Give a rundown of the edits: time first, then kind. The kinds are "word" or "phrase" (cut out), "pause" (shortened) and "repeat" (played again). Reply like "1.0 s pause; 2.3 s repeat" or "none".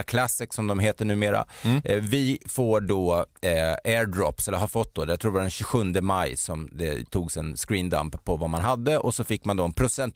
none